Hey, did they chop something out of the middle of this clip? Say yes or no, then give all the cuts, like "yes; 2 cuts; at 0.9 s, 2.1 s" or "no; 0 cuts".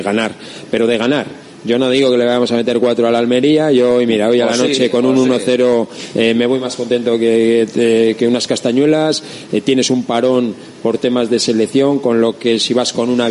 no; 0 cuts